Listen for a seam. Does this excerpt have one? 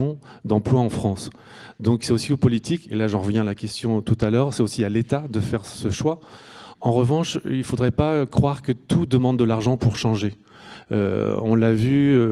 no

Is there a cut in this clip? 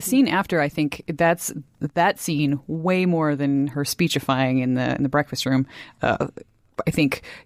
no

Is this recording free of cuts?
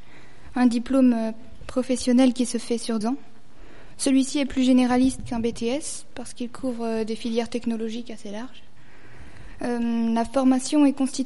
no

